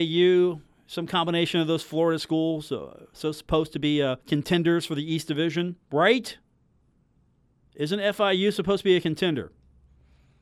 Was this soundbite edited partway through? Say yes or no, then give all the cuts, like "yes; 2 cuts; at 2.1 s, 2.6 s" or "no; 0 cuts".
yes; 2 cuts; at 4.2 s, 5.8 s